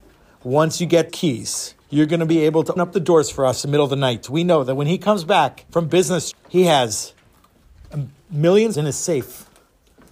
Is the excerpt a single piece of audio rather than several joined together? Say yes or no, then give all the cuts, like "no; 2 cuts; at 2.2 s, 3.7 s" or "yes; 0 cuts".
no; 6 cuts; at 1.1 s, 1.8 s, 2.8 s, 5.7 s, 6.3 s, 8.7 s